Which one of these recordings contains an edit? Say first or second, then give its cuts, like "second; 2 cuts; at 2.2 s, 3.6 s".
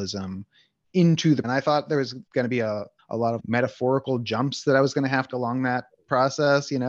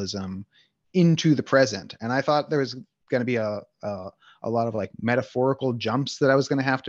first; 5 cuts; at 1.4 s, 2.3 s, 3.0 s, 3.4 s, 5.3 s